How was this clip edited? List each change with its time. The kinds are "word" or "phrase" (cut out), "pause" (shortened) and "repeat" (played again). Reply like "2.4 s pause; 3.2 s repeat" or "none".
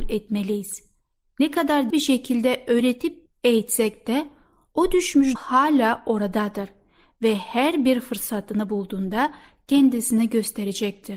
1.9 s word; 5.4 s word